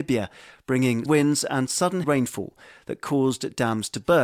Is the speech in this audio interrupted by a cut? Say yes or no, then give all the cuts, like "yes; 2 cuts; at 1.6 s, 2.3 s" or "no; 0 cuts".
yes; 2 cuts; at 1.1 s, 2.0 s